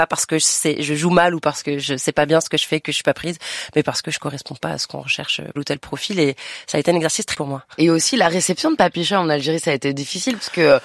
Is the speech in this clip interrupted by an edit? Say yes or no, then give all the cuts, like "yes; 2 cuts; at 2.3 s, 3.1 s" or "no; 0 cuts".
yes; 2 cuts; at 5.6 s, 7.3 s